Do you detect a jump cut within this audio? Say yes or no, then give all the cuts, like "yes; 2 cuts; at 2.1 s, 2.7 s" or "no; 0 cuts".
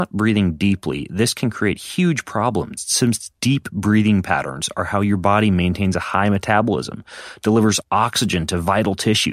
no; 0 cuts